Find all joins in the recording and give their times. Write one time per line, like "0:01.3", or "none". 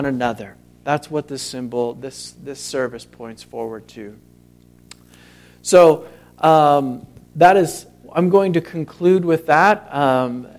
none